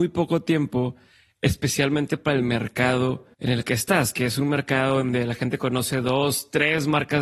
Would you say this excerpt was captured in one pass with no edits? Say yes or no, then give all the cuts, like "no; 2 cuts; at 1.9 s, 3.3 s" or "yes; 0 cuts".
no; 1 cut; at 3.3 s